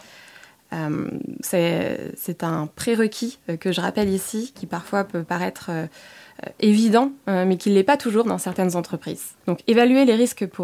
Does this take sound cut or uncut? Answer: cut